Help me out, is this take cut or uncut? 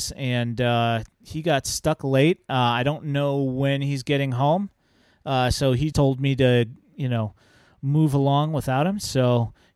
cut